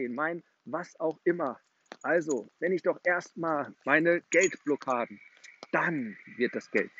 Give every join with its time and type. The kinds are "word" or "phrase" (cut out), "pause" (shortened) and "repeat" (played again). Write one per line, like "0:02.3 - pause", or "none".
0:02.5 - pause
0:03.7 - phrase